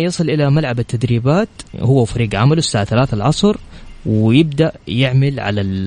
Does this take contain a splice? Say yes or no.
yes